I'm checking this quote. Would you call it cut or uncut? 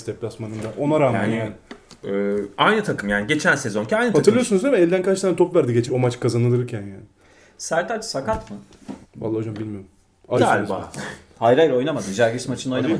cut